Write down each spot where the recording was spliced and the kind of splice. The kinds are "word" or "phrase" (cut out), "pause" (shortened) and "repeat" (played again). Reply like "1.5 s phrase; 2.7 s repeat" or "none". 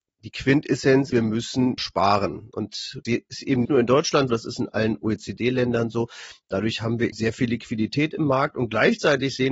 1.1 s word; 1.8 s word; 3.0 s word; 3.6 s word; 4.3 s word; 7.1 s word